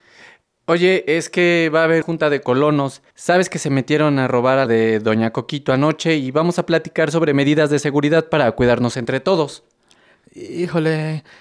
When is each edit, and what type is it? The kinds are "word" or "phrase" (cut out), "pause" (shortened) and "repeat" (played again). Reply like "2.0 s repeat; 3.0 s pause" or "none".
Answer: 2.0 s word; 3.1 s pause; 4.7 s phrase